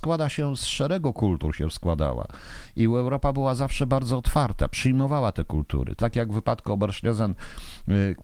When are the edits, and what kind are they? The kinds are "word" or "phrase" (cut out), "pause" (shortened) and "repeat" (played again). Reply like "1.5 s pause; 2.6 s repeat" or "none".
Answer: 6.0 s phrase